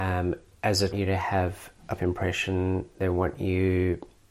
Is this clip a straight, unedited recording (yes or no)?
no